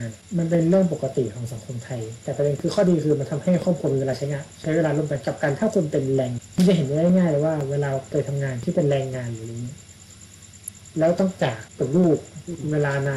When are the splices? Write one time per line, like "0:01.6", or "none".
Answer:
none

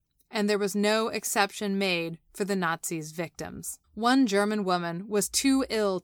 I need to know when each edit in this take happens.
0:03.8

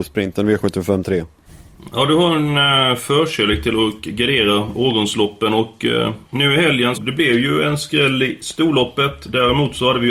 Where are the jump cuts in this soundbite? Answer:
0:06.2
0:06.9

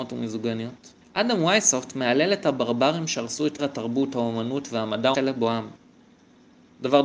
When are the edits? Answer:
0:01.0
0:03.6
0:05.1

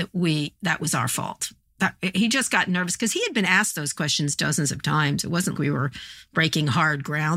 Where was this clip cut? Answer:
0:05.5

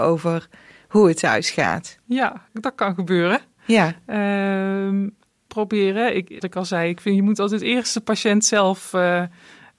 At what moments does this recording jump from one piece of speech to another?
0:02.5
0:05.5
0:06.4

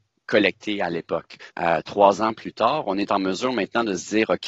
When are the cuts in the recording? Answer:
0:01.5

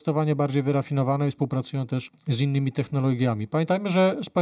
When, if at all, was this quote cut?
none

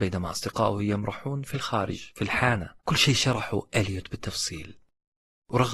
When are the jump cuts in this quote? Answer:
0:02.8

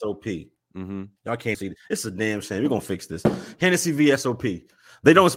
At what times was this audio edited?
0:01.2
0:01.5

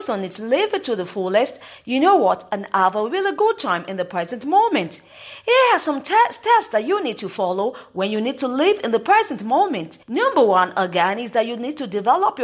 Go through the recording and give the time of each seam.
0:10.0

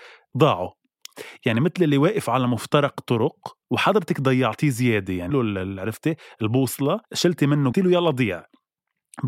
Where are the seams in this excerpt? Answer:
0:03.6
0:05.3
0:07.0
0:07.7

